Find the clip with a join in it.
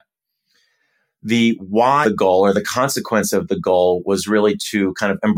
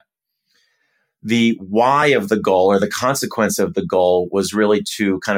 first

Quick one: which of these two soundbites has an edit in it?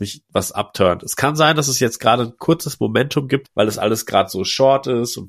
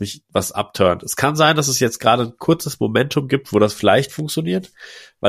first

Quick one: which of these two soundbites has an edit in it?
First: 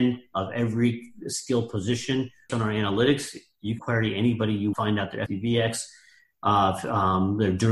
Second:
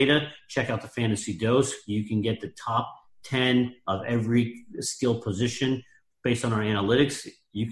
first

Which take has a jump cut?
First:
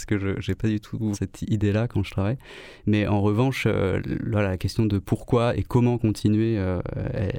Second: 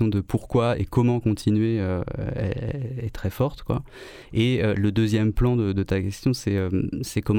first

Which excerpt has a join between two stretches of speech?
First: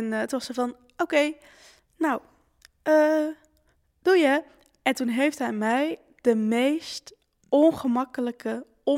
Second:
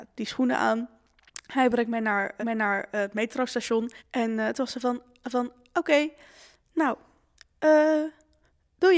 second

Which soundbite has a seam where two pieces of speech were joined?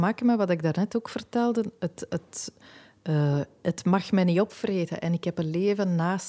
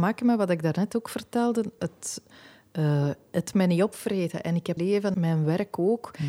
second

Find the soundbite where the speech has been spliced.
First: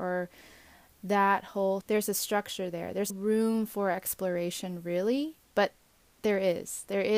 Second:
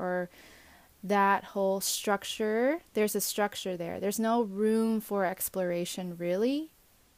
first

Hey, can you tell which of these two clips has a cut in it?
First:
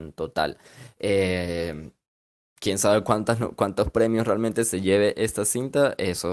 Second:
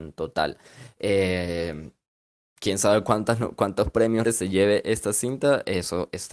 second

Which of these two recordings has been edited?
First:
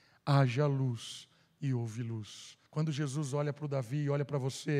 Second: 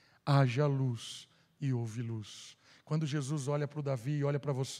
first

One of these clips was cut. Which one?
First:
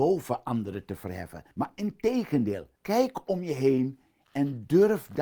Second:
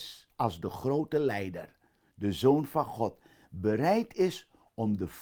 first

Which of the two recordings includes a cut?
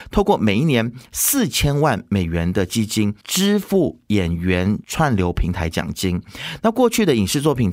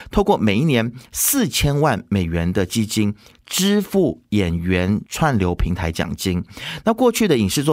first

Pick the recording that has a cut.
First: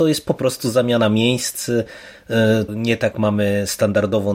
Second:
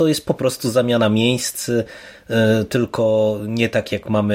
first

